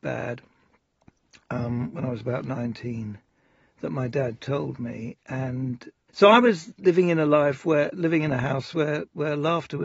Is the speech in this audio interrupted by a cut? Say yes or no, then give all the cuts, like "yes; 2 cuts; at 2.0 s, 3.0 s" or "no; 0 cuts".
yes; 2 cuts; at 6.1 s, 7.9 s